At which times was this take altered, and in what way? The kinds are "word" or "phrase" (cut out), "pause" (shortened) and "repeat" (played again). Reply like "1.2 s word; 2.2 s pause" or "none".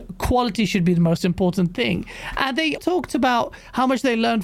2.8 s word